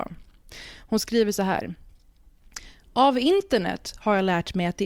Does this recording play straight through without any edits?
yes; 0 cuts

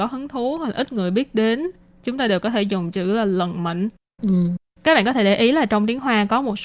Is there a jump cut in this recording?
no; 0 cuts

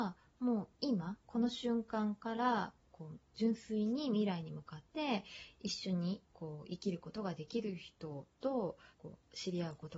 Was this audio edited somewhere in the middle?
yes; 4 cuts; at 2.8 s, 4.9 s, 6.2 s, 8.9 s

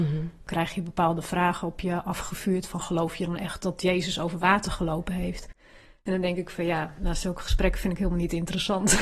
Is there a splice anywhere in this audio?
no; 0 cuts

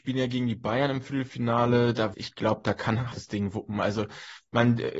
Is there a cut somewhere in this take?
yes; 2 cuts; at 2.1 s, 3.1 s

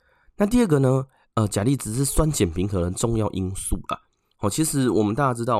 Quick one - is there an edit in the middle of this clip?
no; 0 cuts

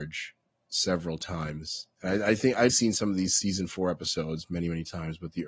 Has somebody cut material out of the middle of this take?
yes; 1 cut; at 2.7 s

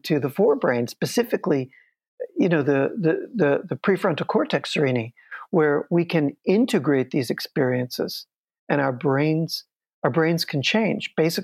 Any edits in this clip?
no; 0 cuts

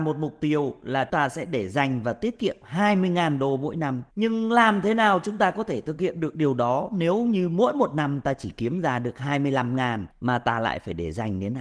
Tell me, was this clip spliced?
yes; 3 cuts; at 1.1 s, 4.1 s, 10.1 s

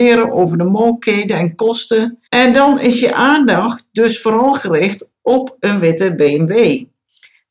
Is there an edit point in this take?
yes; 1 cut; at 2.3 s

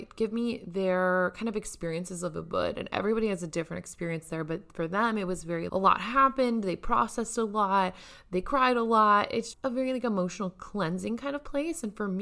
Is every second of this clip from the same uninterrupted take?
no; 2 cuts; at 5.7 s, 9.5 s

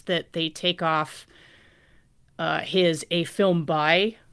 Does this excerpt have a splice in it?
no; 0 cuts

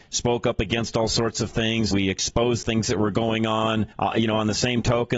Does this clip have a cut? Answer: yes; 3 cuts; at 1.9 s, 2.6 s, 3.9 s

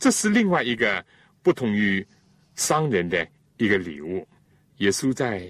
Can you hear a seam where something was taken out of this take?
yes; 1 cut; at 4.4 s

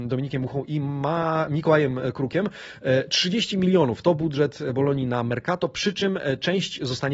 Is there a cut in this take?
no; 0 cuts

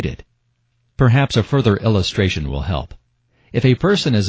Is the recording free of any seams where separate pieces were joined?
yes; 0 cuts

